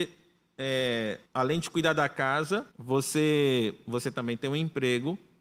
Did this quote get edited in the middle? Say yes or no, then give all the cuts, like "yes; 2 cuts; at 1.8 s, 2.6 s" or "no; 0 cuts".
yes; 2 cuts; at 1.3 s, 2.7 s